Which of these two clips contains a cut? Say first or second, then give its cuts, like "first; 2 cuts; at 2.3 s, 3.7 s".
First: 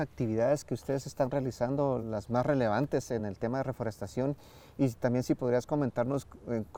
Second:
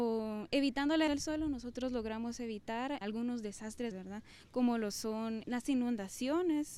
second; 4 cuts; at 1.1 s, 3.0 s, 3.9 s, 5.4 s